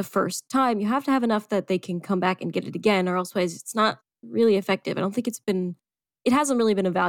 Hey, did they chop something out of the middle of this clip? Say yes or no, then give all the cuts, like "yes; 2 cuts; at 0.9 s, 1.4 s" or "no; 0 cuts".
no; 0 cuts